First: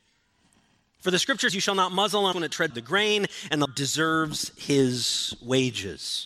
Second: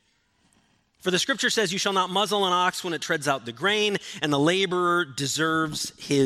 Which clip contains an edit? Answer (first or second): first